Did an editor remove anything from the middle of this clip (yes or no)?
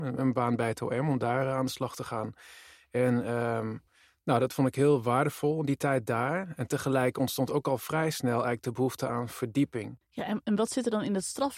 no